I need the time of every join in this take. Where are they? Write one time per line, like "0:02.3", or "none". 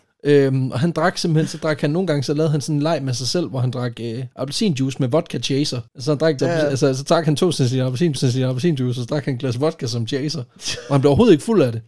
0:04.3
0:05.9
0:06.4
0:08.2

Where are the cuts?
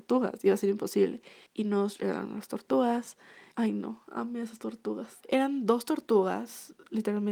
0:01.5
0:03.5
0:05.2

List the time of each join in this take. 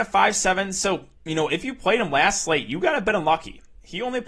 0:01.1

